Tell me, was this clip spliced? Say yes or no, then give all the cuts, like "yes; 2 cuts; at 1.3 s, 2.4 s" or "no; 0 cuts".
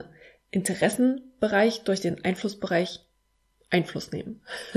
no; 0 cuts